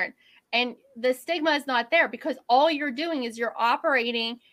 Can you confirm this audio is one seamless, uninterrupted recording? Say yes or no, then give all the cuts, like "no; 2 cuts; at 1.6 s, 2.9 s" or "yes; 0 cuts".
yes; 0 cuts